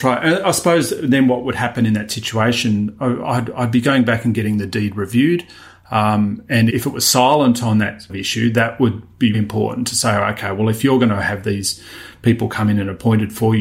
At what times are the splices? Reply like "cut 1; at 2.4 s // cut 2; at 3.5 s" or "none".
cut 1; at 6.7 s // cut 2; at 8.1 s // cut 3; at 9.3 s